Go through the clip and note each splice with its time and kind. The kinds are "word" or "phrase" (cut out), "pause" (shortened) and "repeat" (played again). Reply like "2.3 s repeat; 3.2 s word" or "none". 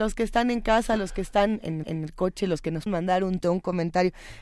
1.8 s repeat; 2.9 s word; 3.4 s word